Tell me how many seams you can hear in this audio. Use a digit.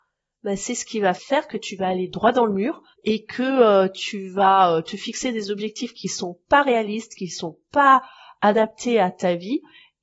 2